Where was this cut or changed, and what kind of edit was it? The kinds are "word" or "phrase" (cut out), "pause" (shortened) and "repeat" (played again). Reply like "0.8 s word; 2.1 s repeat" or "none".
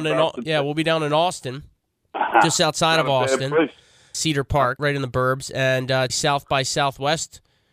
4.1 s word; 4.8 s word; 6.1 s word

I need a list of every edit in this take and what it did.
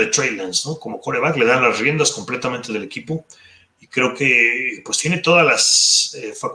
none

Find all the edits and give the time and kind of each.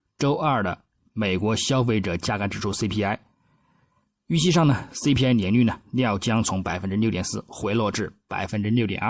none

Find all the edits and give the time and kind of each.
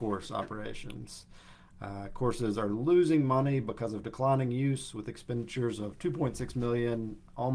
none

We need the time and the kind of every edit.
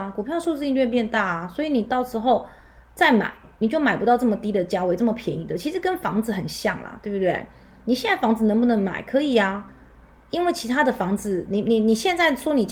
none

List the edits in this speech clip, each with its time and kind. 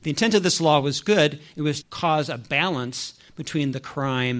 1.8 s word

